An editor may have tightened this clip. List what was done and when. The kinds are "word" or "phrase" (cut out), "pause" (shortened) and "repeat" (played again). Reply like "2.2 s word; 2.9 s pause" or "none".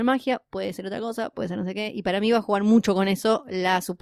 none